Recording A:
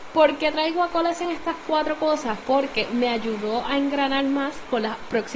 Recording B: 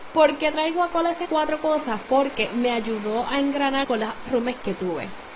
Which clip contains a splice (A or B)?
B